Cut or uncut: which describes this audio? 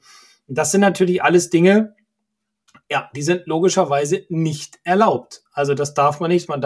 uncut